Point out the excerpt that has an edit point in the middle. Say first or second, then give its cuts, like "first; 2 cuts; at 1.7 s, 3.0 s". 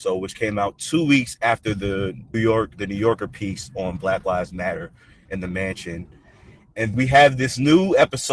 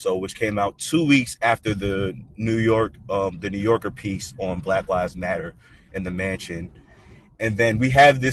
first; 3 cuts; at 2.3 s, 2.8 s, 6.9 s